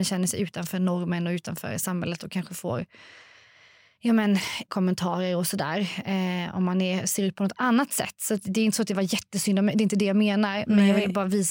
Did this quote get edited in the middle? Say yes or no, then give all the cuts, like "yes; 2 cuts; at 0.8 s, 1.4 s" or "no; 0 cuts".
yes; 1 cut; at 4.7 s